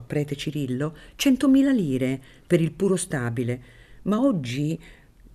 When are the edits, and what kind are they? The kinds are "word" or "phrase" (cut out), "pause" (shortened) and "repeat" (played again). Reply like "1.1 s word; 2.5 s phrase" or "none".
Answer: none